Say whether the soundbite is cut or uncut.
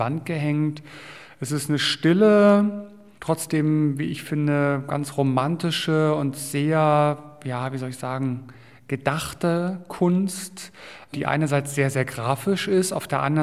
uncut